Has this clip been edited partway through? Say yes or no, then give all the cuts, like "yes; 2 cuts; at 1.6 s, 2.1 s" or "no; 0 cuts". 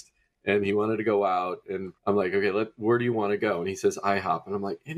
yes; 1 cut; at 1.9 s